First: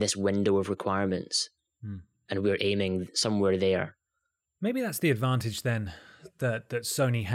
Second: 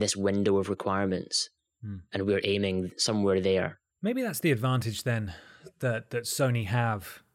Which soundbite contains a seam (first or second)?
second